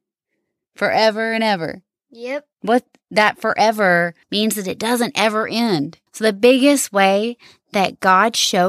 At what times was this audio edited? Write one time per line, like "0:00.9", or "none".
0:02.5
0:04.2
0:06.1